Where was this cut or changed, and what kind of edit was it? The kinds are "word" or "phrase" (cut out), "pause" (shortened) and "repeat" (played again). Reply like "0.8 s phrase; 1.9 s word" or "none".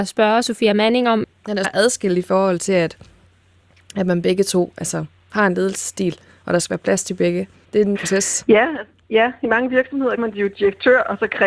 1.6 s word; 7.9 s phrase; 9.0 s pause; 10.2 s word